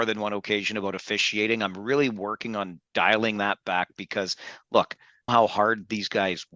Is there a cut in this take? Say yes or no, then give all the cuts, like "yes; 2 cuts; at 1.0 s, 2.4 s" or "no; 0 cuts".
yes; 1 cut; at 5.3 s